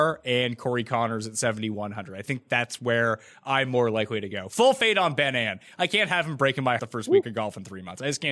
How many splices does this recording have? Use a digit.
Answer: 2